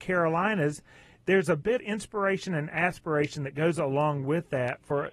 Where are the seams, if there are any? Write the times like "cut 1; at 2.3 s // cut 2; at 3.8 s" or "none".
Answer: cut 1; at 1.8 s